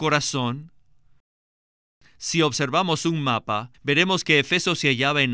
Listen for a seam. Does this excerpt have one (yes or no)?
yes